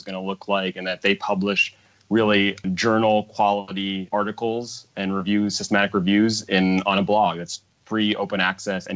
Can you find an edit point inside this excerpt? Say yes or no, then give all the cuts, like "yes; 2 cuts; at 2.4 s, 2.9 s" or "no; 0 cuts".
no; 0 cuts